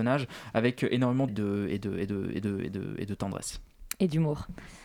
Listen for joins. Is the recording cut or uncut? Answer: cut